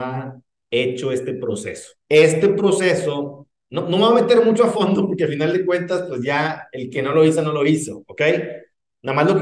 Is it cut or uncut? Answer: cut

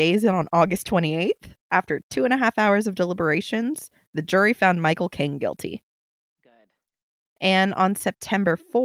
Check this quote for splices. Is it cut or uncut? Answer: uncut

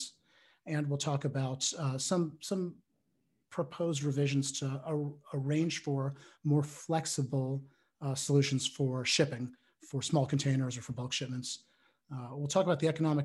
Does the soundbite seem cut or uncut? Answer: uncut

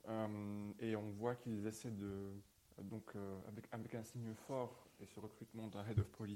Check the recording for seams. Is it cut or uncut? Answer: cut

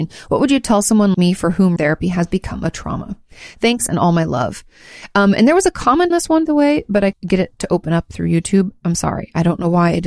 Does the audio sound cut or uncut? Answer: cut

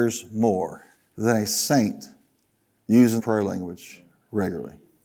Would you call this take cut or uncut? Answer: cut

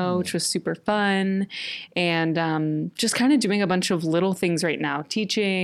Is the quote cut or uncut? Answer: uncut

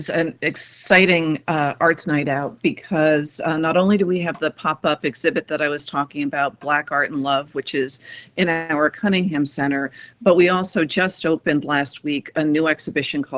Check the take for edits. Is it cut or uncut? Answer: uncut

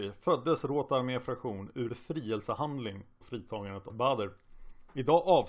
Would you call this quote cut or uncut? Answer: cut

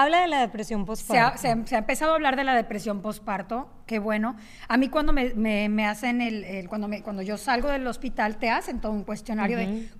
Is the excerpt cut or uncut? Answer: uncut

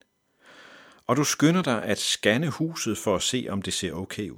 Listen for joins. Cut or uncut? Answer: uncut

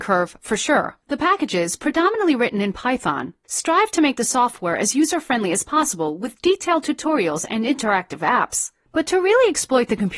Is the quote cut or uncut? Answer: cut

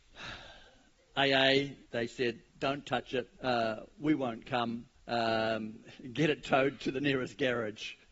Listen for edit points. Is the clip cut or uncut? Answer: cut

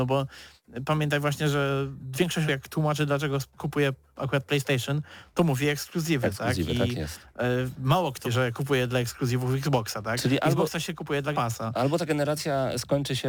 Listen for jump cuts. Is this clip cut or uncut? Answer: cut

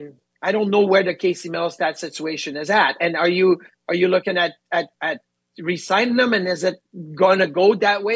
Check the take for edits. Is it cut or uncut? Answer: cut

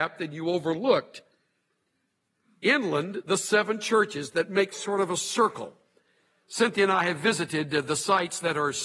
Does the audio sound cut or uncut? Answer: uncut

